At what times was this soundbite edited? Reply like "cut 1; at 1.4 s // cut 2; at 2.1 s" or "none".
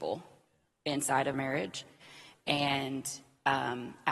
cut 1; at 1.3 s